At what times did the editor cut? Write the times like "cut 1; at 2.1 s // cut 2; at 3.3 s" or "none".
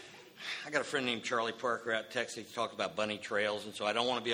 none